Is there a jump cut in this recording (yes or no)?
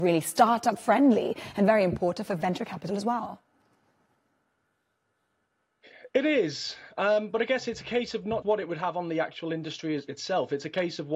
yes